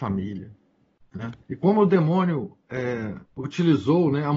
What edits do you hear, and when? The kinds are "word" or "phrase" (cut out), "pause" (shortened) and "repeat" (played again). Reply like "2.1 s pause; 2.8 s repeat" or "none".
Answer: 1.4 s pause; 3.2 s pause